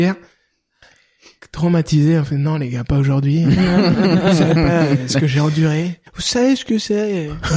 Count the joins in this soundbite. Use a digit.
1